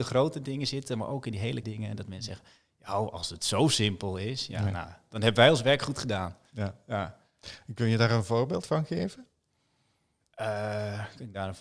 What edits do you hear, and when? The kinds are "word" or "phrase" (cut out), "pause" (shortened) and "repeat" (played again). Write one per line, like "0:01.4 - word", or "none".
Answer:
0:01.6 - word